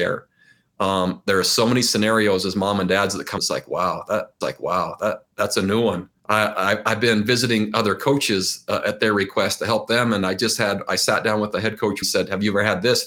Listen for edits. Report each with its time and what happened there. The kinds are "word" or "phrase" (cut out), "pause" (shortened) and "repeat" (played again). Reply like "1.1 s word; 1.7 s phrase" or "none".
3.4 s phrase; 4.4 s repeat; 6.2 s pause; 12.0 s phrase